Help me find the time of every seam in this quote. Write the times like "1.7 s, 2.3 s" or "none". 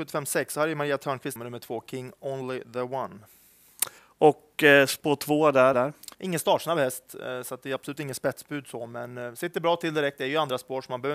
1.4 s, 4.0 s, 5.7 s, 6.1 s